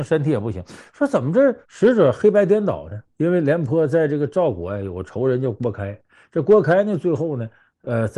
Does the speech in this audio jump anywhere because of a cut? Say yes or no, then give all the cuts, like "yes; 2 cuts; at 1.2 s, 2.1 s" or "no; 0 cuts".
yes; 2 cuts; at 1.6 s, 3.1 s